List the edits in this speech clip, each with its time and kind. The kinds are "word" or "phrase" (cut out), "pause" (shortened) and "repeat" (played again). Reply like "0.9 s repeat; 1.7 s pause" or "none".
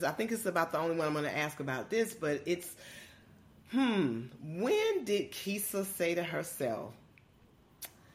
none

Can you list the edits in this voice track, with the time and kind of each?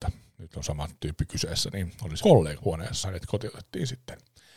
2.2 s word; 2.6 s word; 3.0 s word

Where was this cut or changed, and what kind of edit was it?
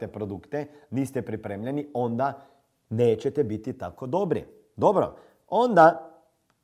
none

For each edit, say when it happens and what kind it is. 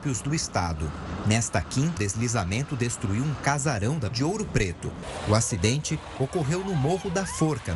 2.0 s word; 4.1 s word

